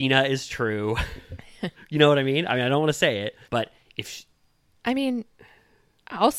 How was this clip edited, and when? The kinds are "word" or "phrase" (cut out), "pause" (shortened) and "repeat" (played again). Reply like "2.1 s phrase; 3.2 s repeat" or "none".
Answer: 3.4 s pause

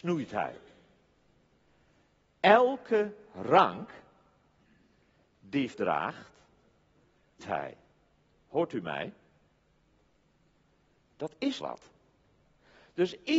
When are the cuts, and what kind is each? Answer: 5.7 s word; 7.4 s word; 11.6 s word

